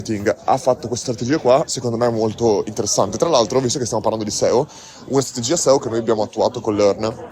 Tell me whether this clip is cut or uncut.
uncut